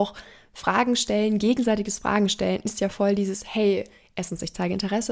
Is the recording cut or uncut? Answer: uncut